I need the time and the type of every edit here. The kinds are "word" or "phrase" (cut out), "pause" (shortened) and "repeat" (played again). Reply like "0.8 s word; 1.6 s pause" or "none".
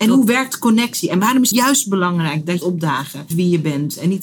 1.5 s word; 2.6 s phrase; 3.3 s word